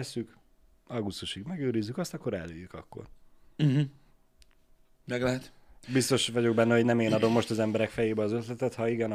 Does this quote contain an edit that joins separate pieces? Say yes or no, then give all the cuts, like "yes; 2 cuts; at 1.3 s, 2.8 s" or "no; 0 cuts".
no; 0 cuts